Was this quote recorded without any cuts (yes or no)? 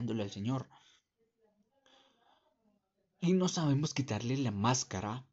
yes